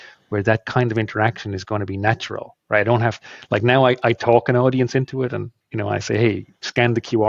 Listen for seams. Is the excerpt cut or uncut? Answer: uncut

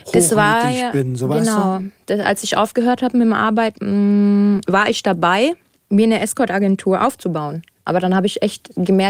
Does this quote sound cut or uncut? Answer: uncut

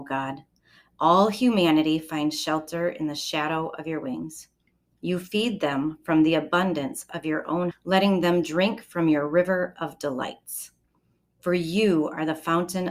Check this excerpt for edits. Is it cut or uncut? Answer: cut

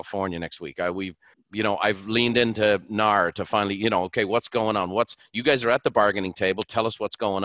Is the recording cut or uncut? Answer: cut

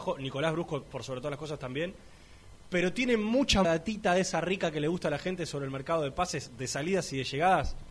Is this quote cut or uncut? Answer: cut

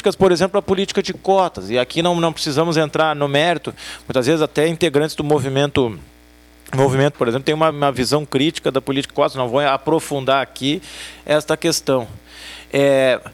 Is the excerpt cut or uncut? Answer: cut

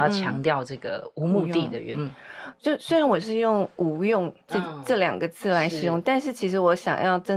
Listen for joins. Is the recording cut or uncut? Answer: cut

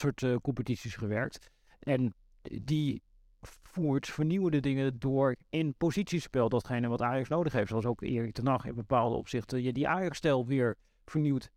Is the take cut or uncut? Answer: uncut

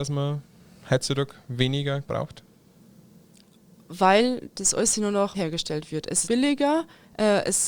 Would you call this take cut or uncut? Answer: cut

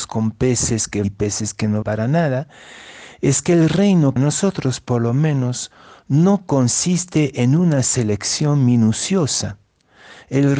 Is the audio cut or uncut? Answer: cut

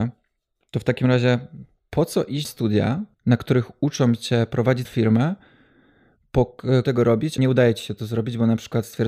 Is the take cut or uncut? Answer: cut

